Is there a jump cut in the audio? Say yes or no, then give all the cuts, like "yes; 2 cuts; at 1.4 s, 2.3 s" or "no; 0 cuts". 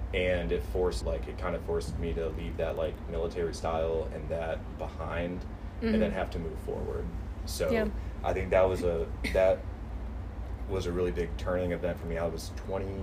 yes; 1 cut; at 1.0 s